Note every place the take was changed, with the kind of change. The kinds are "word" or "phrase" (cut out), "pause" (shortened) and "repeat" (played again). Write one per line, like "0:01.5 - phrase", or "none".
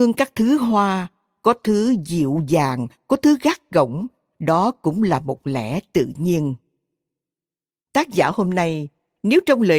none